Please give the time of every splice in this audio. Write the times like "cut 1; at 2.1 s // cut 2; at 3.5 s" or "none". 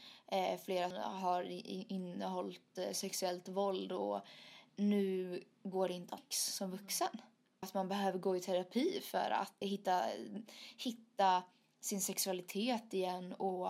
cut 1; at 0.9 s // cut 2; at 4.7 s // cut 3; at 6.2 s // cut 4; at 7.6 s // cut 5; at 9.6 s